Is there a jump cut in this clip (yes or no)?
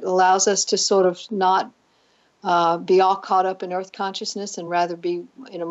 no